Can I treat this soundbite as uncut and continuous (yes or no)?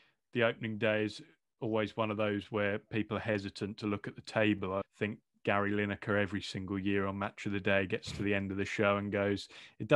no